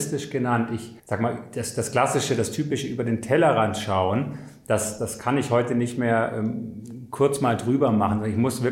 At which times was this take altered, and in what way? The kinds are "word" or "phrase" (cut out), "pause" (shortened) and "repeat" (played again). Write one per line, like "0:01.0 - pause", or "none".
0:01.0 - pause
0:05.0 - word